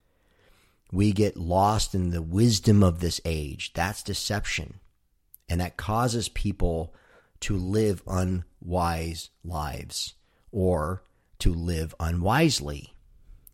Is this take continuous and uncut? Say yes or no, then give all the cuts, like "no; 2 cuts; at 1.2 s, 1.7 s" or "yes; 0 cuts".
yes; 0 cuts